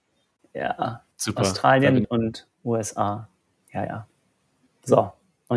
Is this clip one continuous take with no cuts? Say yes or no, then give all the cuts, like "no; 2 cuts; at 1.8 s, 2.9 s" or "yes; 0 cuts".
no; 5 cuts; at 1.1 s, 2.0 s, 2.5 s, 3.9 s, 4.5 s